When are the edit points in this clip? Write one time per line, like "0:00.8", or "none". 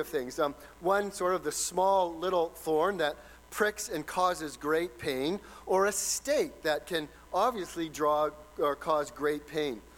none